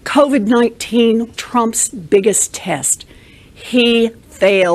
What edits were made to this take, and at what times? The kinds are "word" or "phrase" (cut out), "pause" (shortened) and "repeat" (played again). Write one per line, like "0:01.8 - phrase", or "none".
0:01.3 - word